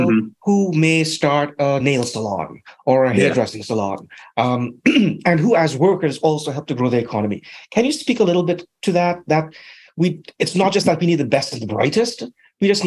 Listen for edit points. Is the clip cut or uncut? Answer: uncut